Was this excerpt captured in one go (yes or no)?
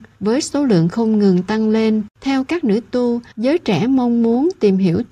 no